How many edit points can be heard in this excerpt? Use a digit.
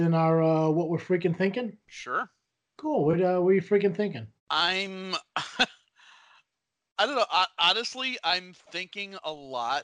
2